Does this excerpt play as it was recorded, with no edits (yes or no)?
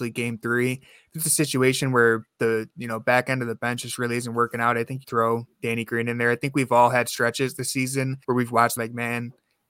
no